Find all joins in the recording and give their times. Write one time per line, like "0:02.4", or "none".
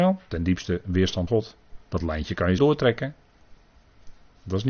0:01.3
0:01.8
0:02.6